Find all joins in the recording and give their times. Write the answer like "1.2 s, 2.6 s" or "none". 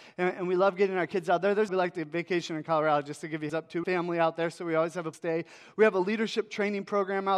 1.7 s, 3.5 s, 3.8 s, 5.1 s